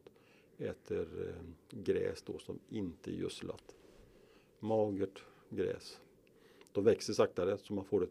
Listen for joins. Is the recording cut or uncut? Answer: uncut